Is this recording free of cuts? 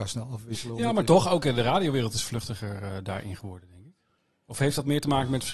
yes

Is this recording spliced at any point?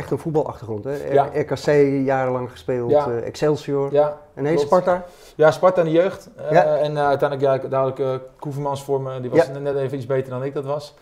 no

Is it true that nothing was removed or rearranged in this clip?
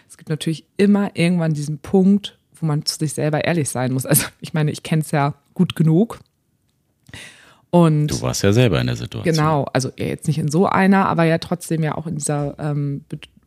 yes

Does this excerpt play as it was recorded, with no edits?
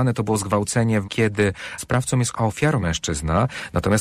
no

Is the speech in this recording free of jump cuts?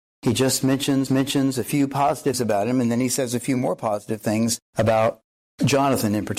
no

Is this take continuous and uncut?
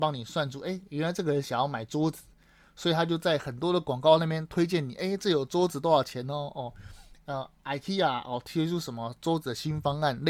yes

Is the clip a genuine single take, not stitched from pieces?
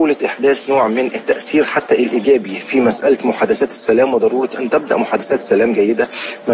yes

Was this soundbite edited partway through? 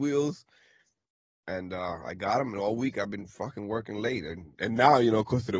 no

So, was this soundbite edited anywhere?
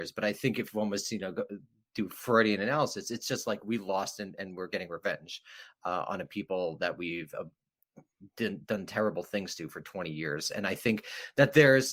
no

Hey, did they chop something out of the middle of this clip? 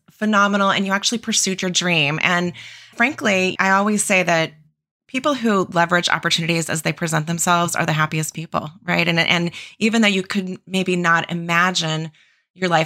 no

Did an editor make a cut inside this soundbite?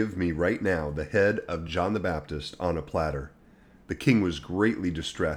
no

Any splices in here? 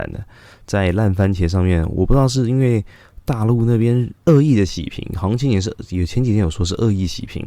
yes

